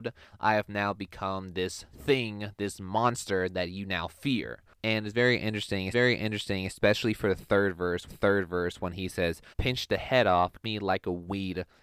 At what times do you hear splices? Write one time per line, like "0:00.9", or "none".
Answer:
0:05.9
0:08.1
0:09.5
0:10.6